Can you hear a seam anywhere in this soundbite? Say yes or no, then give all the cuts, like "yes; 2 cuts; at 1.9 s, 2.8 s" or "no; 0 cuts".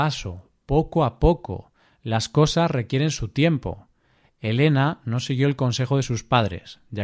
no; 0 cuts